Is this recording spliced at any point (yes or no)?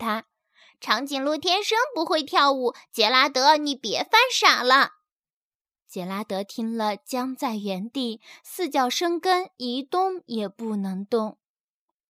no